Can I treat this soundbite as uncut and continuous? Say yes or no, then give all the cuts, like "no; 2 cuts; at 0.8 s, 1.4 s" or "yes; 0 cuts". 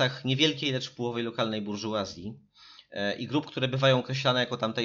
yes; 0 cuts